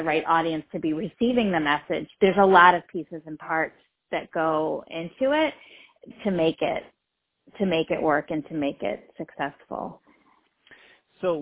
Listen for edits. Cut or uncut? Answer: uncut